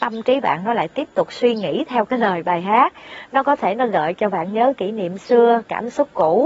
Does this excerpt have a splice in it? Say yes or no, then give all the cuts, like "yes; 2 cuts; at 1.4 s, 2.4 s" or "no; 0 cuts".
no; 0 cuts